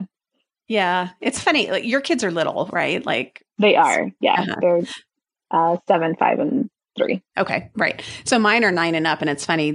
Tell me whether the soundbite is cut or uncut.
cut